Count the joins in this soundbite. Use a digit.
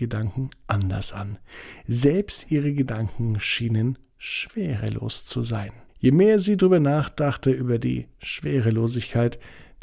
1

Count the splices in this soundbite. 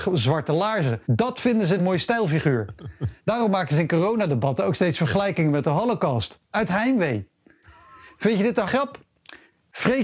5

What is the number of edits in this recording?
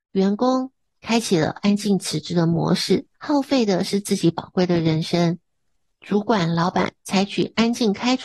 2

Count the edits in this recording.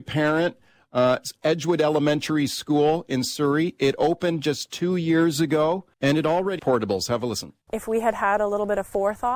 3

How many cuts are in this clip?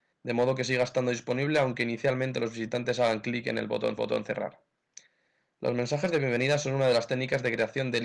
1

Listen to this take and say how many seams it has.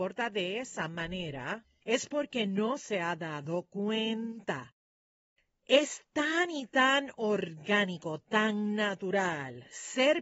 0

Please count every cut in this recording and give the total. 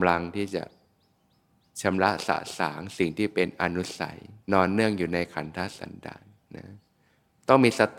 1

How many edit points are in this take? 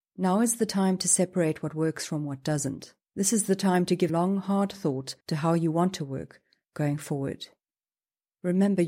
3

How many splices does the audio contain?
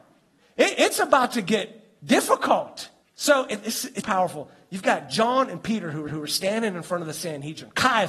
3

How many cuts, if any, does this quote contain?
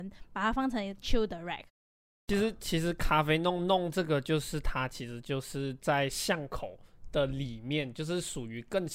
0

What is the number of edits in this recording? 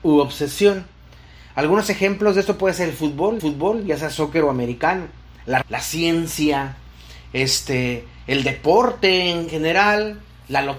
2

